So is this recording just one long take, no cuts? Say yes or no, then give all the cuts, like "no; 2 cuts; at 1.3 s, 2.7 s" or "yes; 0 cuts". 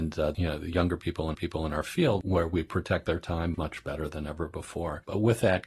no; 2 cuts; at 1.3 s, 3.5 s